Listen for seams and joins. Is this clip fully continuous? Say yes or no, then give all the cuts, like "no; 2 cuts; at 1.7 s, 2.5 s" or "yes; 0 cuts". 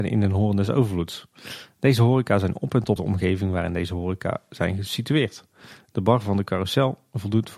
no; 1 cut; at 3.0 s